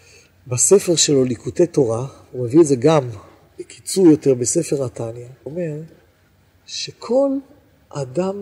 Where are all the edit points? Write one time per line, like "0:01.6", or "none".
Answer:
0:05.5